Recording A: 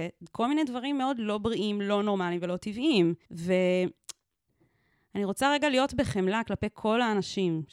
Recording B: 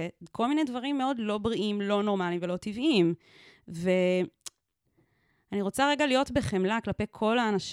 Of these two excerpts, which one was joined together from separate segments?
A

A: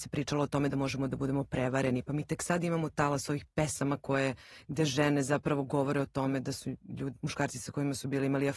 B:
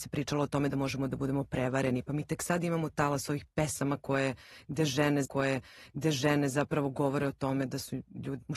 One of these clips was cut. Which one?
B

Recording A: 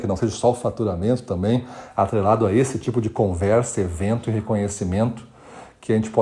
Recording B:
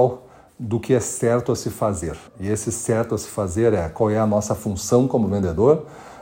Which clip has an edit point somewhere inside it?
B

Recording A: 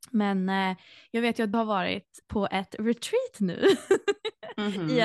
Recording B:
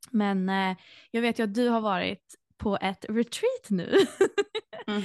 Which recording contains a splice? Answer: A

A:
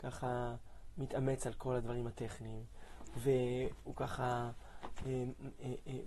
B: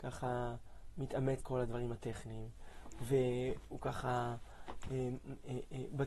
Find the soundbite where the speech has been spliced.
B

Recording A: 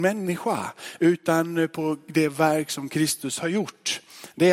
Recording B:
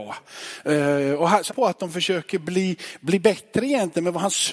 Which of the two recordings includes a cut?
B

